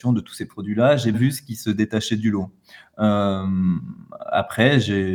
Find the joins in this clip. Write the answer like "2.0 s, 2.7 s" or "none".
1.1 s